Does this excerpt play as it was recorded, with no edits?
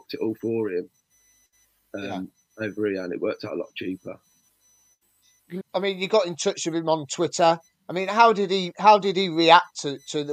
no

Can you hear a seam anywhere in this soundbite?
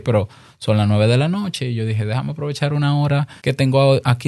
yes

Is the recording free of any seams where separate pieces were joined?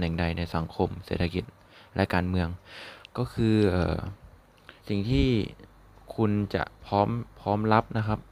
no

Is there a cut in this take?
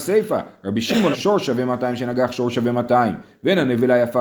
yes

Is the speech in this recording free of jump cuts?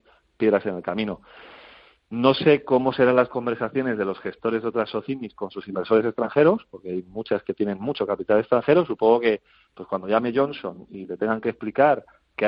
yes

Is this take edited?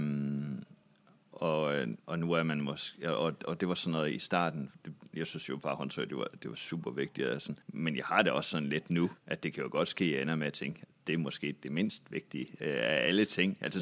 yes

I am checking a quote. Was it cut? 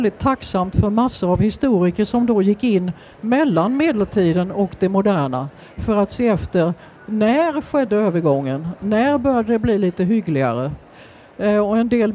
no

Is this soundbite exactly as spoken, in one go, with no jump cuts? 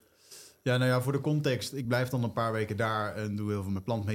yes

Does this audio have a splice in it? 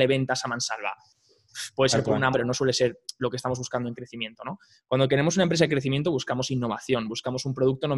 yes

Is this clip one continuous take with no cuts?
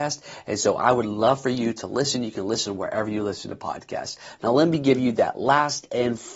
yes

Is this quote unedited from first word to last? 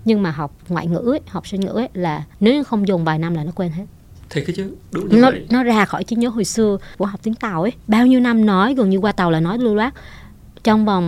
no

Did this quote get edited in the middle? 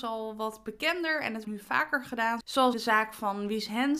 yes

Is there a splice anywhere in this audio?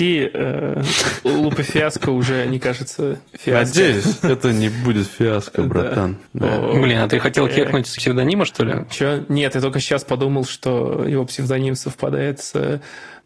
yes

